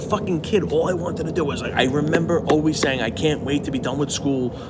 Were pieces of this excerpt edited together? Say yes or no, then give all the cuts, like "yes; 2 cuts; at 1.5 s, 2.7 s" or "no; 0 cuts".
no; 0 cuts